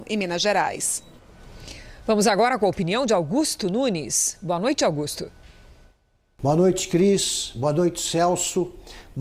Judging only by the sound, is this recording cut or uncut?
uncut